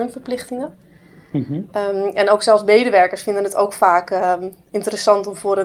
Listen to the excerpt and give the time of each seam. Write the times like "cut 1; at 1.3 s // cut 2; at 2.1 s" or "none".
none